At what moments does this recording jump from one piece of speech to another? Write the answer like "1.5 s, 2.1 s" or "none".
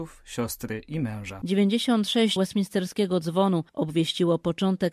2.4 s, 3.7 s